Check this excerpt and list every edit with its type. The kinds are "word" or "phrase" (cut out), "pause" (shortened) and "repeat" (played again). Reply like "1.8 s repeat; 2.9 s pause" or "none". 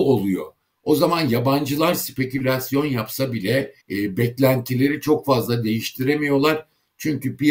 3.8 s pause